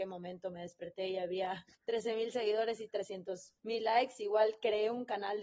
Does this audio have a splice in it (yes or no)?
yes